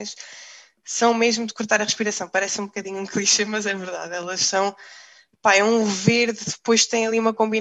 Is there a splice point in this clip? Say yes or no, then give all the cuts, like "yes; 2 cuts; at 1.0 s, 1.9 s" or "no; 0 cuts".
no; 0 cuts